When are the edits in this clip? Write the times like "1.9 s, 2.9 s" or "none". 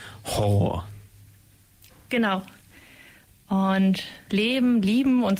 4.3 s